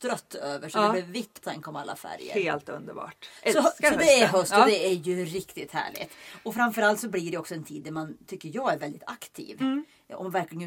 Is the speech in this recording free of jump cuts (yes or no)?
no